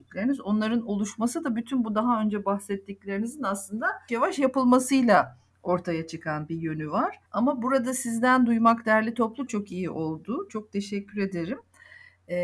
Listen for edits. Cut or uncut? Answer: cut